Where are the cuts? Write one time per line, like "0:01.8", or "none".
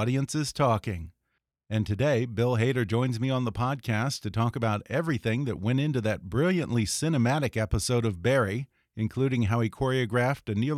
none